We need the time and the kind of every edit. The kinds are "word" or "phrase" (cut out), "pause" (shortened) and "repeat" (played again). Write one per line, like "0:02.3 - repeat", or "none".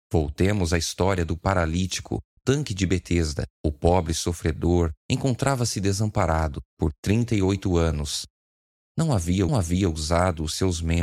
0:02.4 - word
0:03.5 - pause
0:05.0 - pause
0:06.7 - pause
0:09.5 - repeat